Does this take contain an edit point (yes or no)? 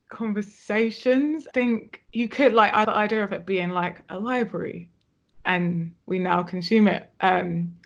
yes